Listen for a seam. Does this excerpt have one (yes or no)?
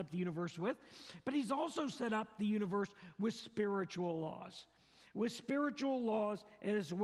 no